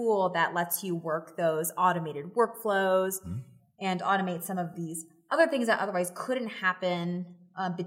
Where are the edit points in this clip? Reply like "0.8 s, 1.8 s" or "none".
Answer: none

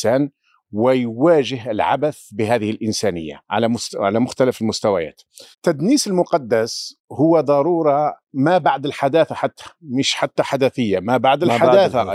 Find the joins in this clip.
3.5 s, 5.5 s, 7.0 s, 8.2 s

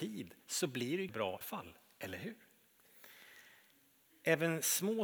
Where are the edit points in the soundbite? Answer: 1.1 s, 1.4 s

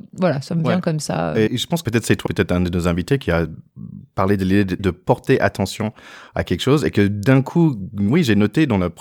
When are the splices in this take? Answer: 1.5 s, 1.8 s, 2.3 s, 4.8 s

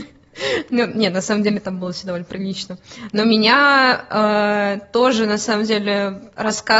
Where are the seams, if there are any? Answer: none

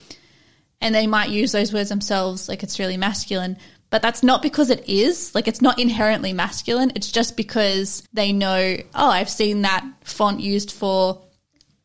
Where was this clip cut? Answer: 8.1 s

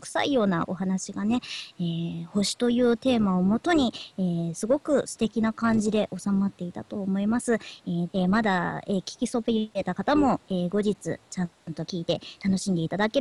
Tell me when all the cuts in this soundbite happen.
8.1 s

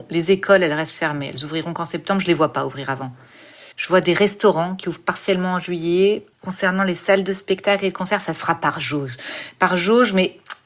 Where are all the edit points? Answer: 3.7 s, 6.3 s

